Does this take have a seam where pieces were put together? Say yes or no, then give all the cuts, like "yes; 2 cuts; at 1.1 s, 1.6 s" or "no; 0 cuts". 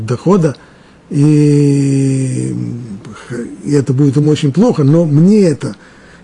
no; 0 cuts